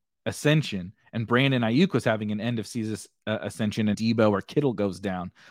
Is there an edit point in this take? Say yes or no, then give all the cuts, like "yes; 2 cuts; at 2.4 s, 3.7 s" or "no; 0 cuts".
yes; 1 cut; at 3.9 s